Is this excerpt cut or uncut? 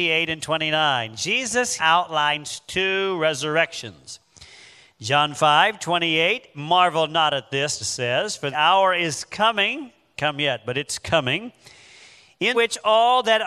cut